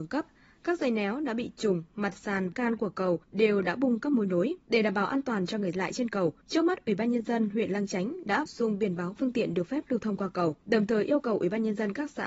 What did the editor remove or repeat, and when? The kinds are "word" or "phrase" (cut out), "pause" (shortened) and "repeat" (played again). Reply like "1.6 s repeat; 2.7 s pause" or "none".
2.5 s word; 3.2 s pause; 4.6 s pause; 5.7 s phrase; 6.4 s pause; 8.5 s word; 9.2 s phrase; 10.6 s pause